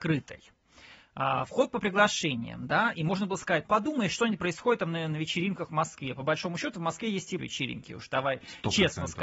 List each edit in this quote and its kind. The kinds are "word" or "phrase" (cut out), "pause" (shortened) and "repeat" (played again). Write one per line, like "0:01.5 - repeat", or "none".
0:03.6 - word
0:07.4 - word